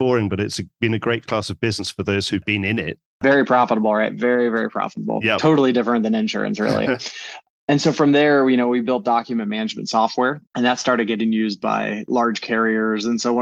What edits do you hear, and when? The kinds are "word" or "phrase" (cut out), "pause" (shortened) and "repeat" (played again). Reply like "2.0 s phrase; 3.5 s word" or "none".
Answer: 10.5 s pause